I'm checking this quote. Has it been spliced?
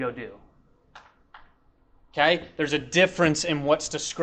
no; 0 cuts

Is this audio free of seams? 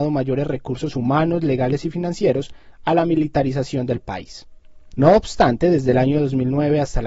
yes; 0 cuts

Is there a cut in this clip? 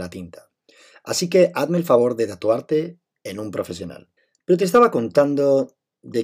yes; 1 cut; at 4.2 s

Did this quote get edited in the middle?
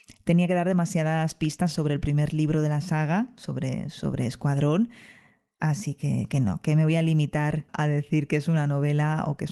no; 0 cuts

